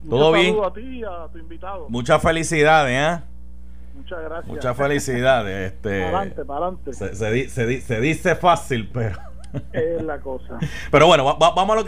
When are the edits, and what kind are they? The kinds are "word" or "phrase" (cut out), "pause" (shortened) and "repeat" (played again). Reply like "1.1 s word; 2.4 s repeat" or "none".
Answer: none